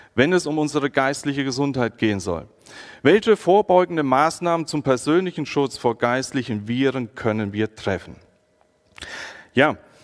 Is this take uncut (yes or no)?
yes